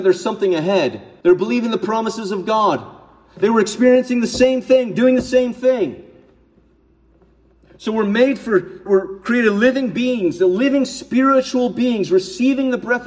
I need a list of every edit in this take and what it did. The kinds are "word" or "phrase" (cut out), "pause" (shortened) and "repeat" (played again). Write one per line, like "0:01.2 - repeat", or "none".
0:01.2 - pause
0:08.9 - word